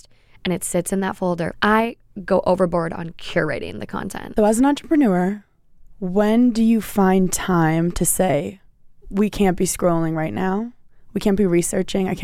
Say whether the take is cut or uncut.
cut